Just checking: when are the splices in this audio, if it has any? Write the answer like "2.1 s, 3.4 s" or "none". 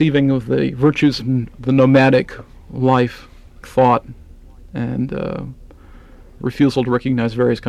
1.2 s, 1.5 s, 3.6 s, 6.4 s